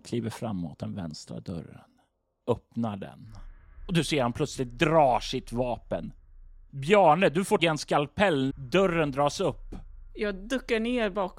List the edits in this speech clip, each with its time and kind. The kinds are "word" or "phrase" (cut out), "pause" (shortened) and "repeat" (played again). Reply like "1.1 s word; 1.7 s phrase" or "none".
7.6 s word; 8.5 s word